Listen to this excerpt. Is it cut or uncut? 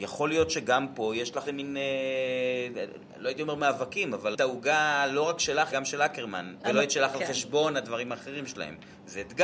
cut